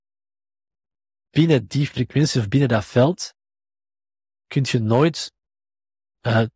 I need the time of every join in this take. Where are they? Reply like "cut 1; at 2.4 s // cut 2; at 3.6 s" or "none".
none